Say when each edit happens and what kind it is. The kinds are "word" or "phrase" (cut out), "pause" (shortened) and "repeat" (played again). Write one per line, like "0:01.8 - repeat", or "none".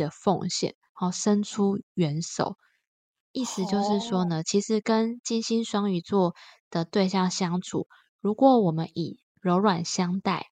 none